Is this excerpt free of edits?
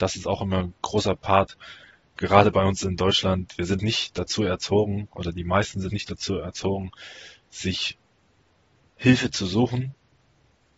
no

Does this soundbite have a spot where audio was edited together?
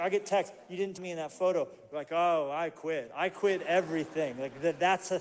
yes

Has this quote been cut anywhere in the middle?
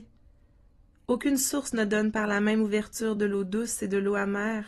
no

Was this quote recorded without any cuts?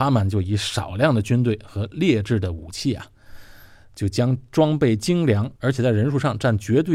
no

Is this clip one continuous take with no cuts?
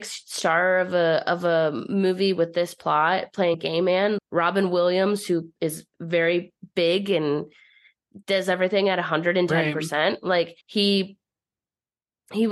no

